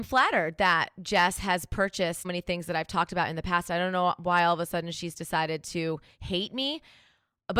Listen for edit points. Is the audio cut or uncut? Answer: cut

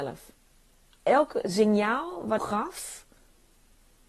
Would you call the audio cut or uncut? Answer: cut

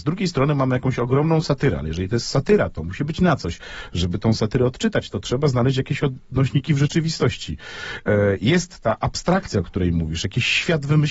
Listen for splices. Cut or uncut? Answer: uncut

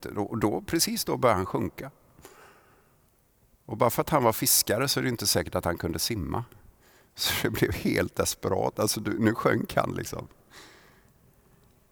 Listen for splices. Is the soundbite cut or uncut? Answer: uncut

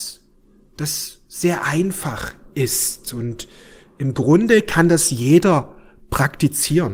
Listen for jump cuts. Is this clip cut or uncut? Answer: uncut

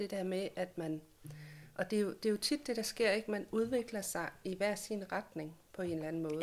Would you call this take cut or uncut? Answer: uncut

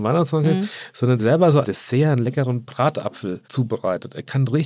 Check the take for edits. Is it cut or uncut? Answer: cut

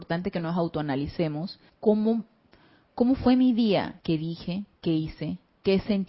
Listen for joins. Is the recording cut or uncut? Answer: cut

